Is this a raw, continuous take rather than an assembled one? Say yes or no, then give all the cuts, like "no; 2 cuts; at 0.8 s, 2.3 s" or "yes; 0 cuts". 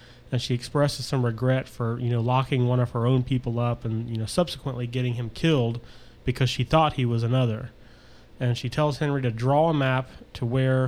yes; 0 cuts